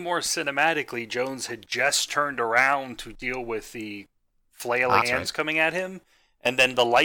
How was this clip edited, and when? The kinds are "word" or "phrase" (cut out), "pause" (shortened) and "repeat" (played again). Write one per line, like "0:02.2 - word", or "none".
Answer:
0:05.0 - phrase

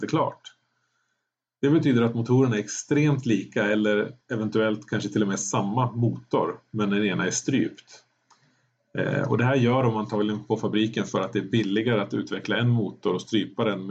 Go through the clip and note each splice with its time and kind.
0:04.2 - pause

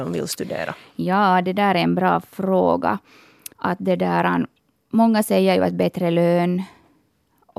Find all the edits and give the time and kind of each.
0:03.5 - pause
0:04.7 - pause

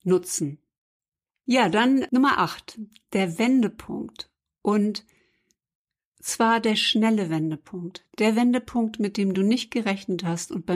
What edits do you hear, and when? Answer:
none

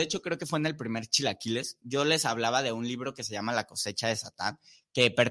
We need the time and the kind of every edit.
none

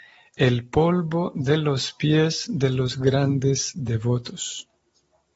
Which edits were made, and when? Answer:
none

